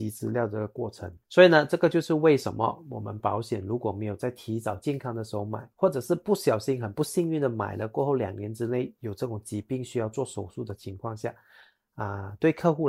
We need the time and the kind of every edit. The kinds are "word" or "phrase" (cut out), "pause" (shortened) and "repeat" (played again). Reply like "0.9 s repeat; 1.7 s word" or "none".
1.2 s pause; 5.7 s pause